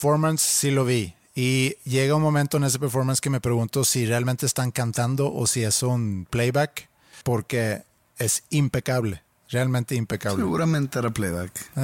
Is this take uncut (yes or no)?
yes